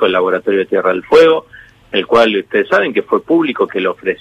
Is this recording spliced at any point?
no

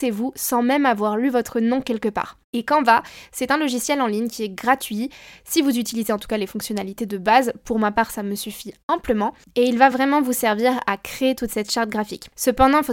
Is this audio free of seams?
yes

